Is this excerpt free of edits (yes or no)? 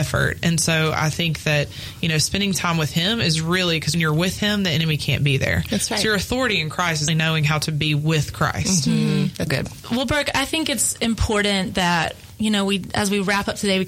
no